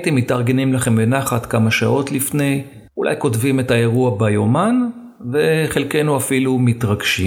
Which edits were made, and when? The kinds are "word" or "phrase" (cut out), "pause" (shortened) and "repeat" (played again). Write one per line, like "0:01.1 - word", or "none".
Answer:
0:02.9 - pause